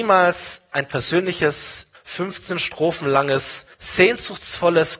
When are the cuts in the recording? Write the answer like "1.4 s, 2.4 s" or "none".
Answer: 1.9 s, 3.7 s